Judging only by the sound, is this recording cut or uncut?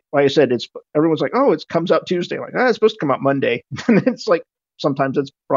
uncut